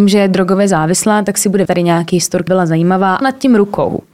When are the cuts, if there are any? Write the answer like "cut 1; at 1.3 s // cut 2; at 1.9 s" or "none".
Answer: cut 1; at 1.7 s // cut 2; at 2.5 s // cut 3; at 3.2 s

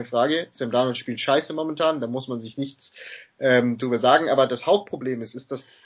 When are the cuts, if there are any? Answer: none

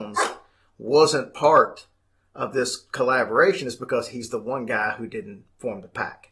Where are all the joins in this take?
none

